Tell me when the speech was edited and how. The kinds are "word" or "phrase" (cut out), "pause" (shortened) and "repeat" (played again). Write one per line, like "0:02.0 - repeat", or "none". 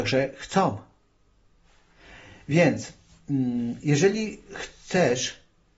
none